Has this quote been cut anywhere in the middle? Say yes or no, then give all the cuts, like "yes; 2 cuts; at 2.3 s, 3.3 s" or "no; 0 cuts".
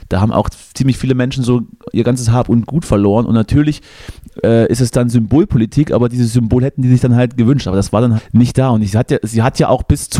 yes; 1 cut; at 8.2 s